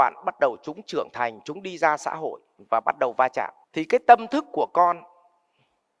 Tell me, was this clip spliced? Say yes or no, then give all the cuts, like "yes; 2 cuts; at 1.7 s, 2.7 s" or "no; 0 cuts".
yes; 1 cut; at 3.6 s